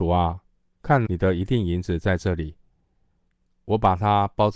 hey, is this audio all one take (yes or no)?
no